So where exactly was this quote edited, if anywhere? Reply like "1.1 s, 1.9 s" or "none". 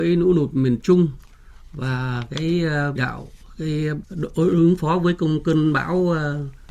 3.0 s, 4.0 s